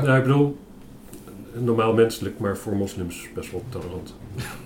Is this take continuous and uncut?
yes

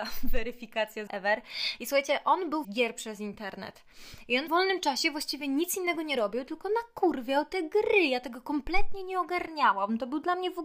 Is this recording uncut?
no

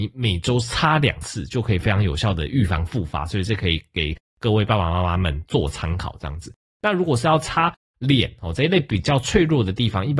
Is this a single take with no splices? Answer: yes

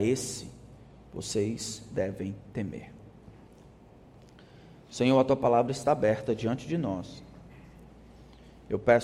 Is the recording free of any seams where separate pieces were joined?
yes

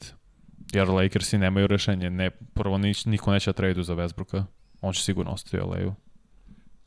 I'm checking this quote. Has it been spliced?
no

